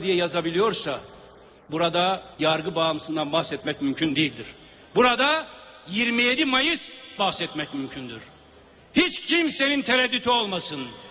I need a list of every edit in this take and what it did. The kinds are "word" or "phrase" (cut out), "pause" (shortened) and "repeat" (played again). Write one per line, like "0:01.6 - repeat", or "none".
0:02.3 - pause
0:07.2 - word